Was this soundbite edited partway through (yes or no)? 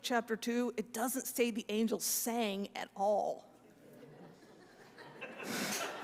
yes